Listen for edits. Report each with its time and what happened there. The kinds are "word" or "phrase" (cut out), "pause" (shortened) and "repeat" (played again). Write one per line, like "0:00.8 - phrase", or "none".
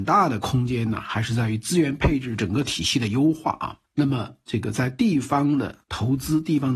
0:05.8 - pause